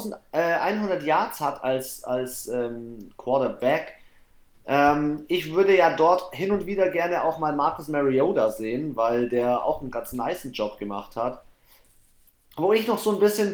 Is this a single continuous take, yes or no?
yes